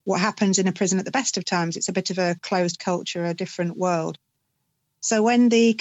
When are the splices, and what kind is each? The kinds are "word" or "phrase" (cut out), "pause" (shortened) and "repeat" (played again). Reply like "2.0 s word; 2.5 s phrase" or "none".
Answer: none